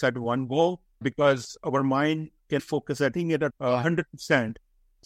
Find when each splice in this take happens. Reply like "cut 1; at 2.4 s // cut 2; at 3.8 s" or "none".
cut 1; at 1.0 s // cut 2; at 2.6 s // cut 3; at 3.1 s // cut 4; at 3.5 s